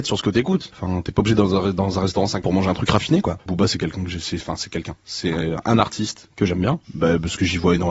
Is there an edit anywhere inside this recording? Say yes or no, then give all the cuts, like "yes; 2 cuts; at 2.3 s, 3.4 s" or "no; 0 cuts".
yes; 2 cuts; at 2.4 s, 6.8 s